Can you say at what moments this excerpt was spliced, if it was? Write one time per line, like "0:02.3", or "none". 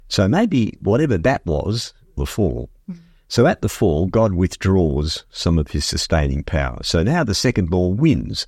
0:02.2